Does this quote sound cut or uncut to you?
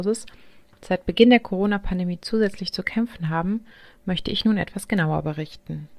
uncut